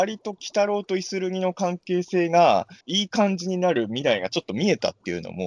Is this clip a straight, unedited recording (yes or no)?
no